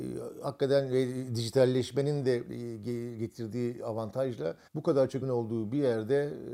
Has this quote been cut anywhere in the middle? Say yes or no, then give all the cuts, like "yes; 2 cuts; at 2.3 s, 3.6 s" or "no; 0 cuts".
yes; 2 cuts; at 4.7 s, 5.2 s